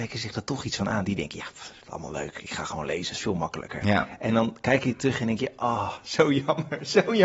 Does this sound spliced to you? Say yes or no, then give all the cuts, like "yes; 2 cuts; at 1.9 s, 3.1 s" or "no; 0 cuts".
no; 0 cuts